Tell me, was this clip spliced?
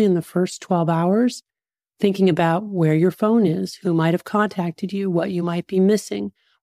no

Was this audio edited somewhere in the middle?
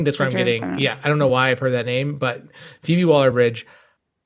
no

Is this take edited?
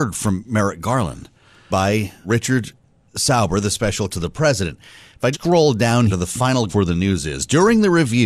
yes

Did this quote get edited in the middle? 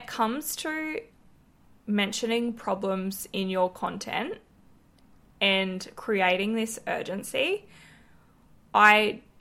no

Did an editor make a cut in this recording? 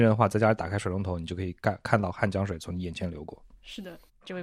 no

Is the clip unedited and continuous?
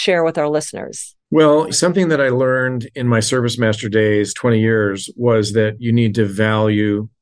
no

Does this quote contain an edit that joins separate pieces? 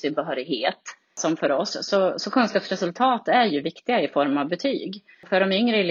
no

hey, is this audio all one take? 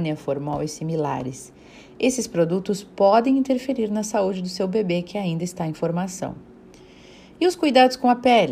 yes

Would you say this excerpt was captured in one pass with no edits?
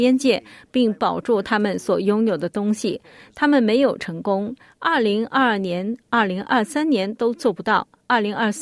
yes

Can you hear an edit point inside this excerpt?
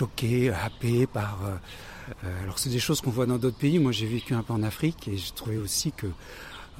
no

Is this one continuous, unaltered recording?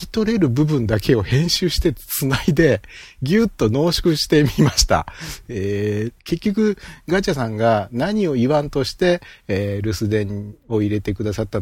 no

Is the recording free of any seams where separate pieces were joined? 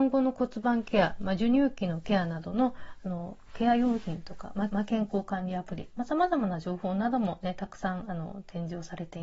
no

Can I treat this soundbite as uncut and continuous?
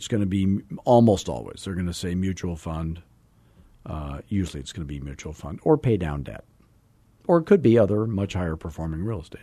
yes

